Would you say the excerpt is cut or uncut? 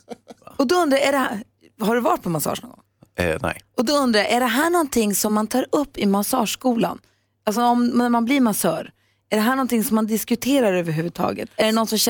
uncut